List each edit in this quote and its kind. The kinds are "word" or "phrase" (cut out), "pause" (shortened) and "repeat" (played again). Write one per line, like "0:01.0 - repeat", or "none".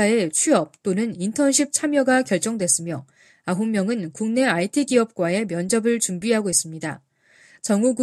none